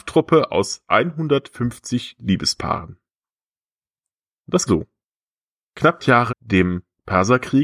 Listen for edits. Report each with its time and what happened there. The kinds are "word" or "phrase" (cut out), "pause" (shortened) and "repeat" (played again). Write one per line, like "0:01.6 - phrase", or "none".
0:02.2 - word
0:04.7 - word
0:06.0 - word
0:06.3 - word